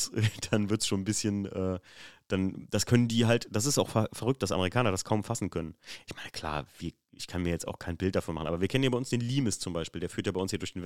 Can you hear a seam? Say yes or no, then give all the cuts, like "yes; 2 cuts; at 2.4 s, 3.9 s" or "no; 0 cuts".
no; 0 cuts